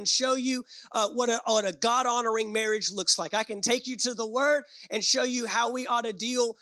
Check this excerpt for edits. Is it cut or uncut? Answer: uncut